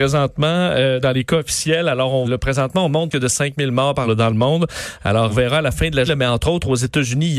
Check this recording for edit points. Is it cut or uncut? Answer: cut